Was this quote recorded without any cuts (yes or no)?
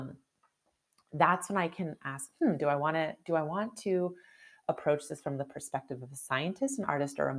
yes